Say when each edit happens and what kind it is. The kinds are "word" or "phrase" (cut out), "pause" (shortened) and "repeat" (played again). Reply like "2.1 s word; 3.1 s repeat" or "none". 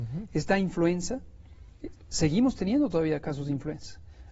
none

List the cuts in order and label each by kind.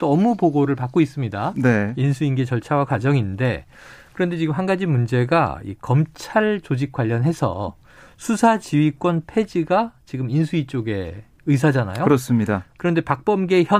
none

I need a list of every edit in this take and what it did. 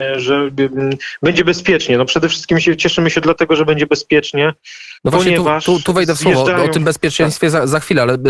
5.0 s pause

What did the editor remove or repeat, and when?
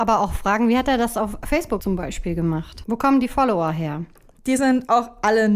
none

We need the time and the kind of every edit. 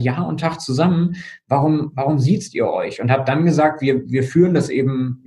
none

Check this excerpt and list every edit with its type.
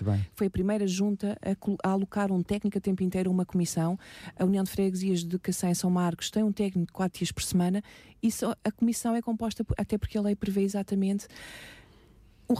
none

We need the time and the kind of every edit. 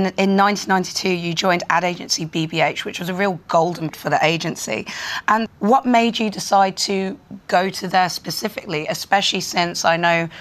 3.9 s word; 5.5 s word

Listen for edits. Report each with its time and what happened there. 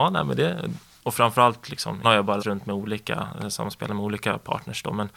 2.0 s word; 2.4 s word

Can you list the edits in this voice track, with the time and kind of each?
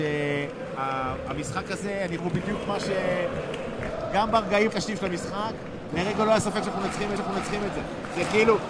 2.2 s word; 4.7 s word; 7.2 s repeat

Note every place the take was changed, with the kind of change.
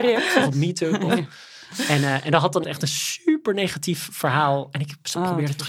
2.6 s word

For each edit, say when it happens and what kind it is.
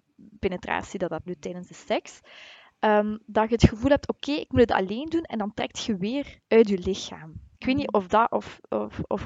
1.3 s word; 6.4 s pause; 7.5 s pause; 7.9 s word

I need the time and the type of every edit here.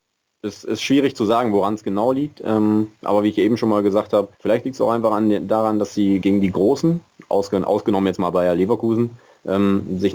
4.3 s pause; 6.2 s word

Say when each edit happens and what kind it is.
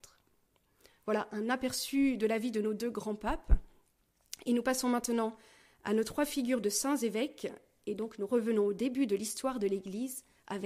none

